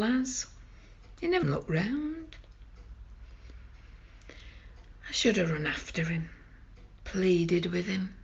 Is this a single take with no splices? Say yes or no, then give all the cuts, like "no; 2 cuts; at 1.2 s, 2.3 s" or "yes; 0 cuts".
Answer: no; 1 cut; at 1.4 s